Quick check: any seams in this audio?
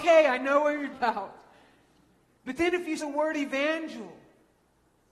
yes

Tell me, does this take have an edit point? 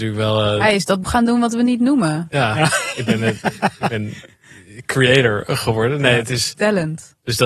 yes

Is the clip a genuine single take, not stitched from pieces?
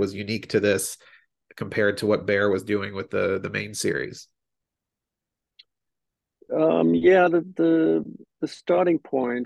yes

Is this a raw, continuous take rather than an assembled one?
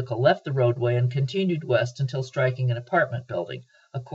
yes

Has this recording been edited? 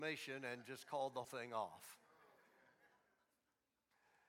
yes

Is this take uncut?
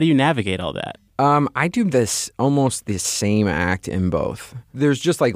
no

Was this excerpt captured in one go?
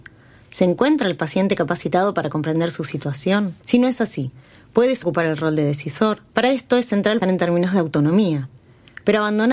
no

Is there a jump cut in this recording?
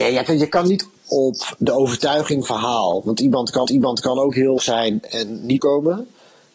yes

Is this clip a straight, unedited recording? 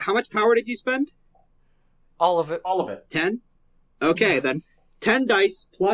yes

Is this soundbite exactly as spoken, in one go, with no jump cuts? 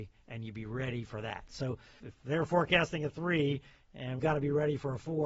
no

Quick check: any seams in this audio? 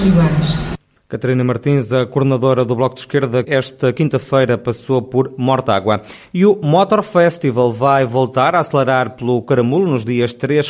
yes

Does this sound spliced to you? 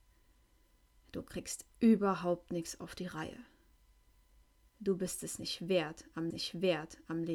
yes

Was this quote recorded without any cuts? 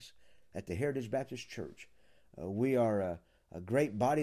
yes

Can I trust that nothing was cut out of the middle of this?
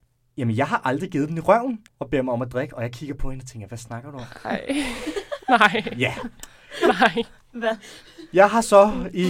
no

